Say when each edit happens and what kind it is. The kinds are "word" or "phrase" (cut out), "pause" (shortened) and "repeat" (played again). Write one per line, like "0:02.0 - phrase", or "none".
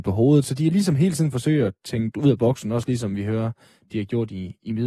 none